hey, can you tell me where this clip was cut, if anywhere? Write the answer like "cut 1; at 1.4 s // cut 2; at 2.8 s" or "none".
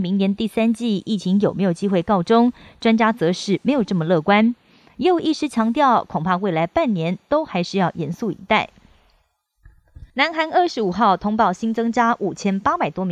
cut 1; at 10.1 s

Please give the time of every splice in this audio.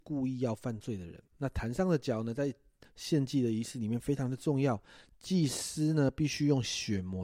cut 1; at 1.3 s

